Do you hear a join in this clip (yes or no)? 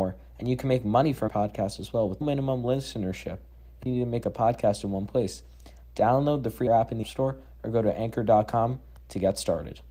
yes